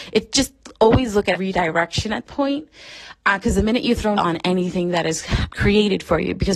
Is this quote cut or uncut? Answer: cut